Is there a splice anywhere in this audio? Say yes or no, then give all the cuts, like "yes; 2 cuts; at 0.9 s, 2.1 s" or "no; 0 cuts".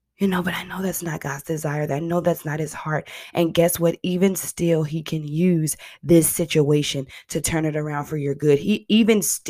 no; 0 cuts